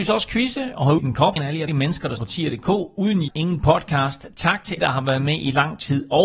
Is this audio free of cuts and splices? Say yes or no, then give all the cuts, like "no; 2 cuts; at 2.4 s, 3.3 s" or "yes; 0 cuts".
no; 6 cuts; at 1.0 s, 1.4 s, 1.7 s, 2.2 s, 3.3 s, 4.8 s